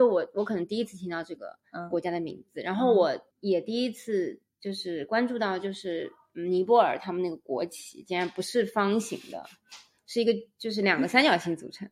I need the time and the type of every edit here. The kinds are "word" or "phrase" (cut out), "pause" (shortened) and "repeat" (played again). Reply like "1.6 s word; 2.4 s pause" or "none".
3.3 s pause